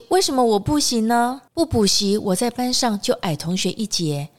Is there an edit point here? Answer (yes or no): yes